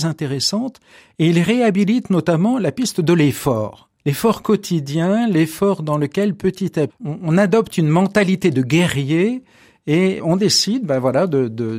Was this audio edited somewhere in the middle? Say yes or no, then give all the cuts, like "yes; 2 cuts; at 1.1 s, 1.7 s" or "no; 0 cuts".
yes; 2 cuts; at 4.0 s, 6.9 s